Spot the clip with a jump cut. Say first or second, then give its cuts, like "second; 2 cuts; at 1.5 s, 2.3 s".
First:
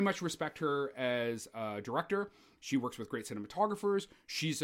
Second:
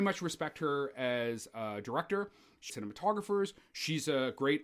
second; 1 cut; at 2.7 s